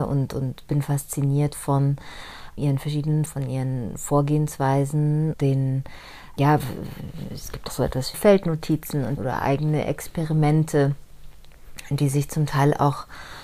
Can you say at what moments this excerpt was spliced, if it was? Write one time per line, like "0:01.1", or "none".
0:02.6
0:03.3
0:05.3
0:06.4
0:07.7
0:08.1
0:09.2